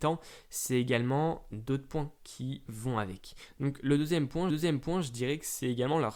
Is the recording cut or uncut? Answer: cut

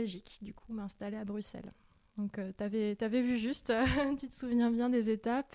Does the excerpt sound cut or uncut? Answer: uncut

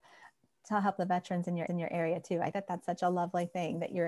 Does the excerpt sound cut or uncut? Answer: cut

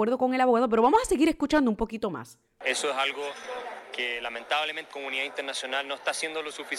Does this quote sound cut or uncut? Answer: cut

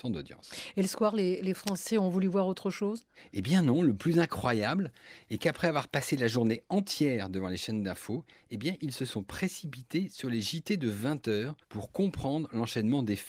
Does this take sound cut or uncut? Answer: cut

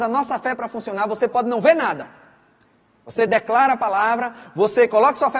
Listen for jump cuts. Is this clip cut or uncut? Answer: uncut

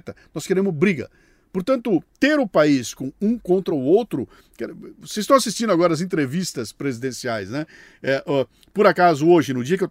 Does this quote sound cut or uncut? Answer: uncut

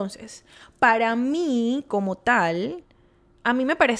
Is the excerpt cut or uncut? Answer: uncut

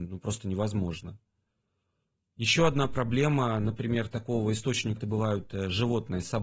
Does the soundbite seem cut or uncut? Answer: cut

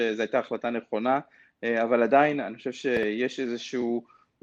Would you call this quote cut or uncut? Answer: uncut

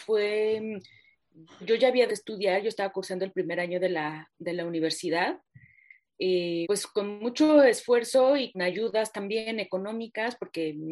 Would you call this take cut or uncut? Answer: cut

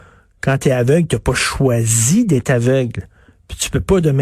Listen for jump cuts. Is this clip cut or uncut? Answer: uncut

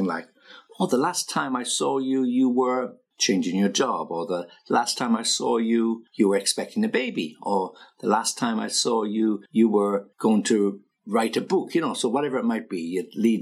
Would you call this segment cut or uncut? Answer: cut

